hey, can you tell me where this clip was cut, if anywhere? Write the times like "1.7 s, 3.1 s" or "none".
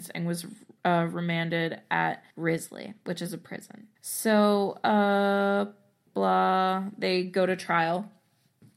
2.3 s, 4.0 s, 6.1 s